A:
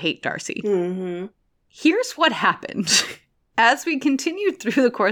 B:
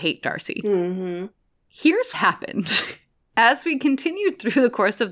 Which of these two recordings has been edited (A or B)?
B